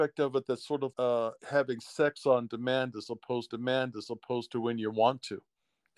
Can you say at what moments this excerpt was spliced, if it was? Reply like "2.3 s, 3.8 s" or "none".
0.9 s, 1.4 s, 3.5 s